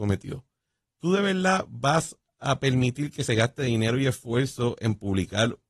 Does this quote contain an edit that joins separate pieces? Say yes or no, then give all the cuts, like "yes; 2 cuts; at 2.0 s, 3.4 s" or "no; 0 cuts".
no; 0 cuts